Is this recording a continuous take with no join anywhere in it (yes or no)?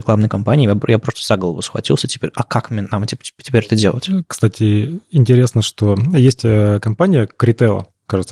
yes